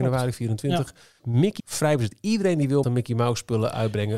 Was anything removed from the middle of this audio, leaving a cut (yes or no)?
yes